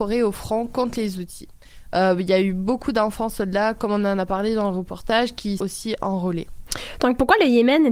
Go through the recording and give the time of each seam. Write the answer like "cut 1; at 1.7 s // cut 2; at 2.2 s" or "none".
cut 1; at 5.6 s